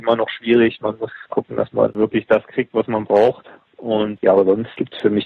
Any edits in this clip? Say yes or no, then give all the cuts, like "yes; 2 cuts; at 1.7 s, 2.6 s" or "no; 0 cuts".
no; 0 cuts